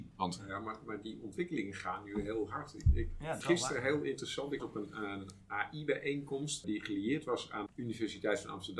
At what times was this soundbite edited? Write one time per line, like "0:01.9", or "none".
0:03.4
0:04.6
0:06.6
0:07.7